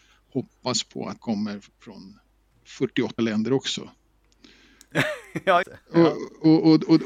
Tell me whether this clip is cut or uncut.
cut